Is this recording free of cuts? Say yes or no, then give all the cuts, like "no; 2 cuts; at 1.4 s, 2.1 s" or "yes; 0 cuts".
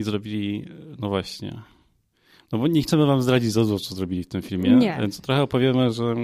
yes; 0 cuts